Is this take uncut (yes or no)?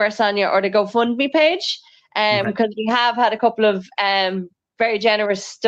yes